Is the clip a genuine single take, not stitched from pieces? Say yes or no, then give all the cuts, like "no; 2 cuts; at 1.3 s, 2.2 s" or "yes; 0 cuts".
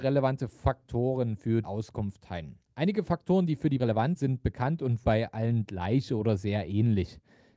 no; 4 cuts; at 1.6 s, 3.8 s, 4.2 s, 5.0 s